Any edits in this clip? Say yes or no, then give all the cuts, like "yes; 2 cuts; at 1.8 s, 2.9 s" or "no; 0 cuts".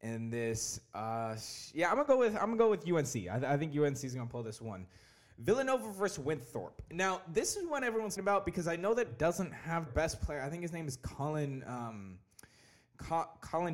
yes; 3 cuts; at 8.2 s, 9.1 s, 9.9 s